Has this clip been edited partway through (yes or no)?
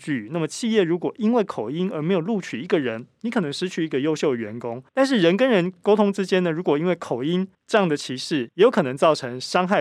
yes